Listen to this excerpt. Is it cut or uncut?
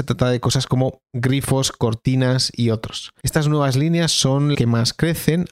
cut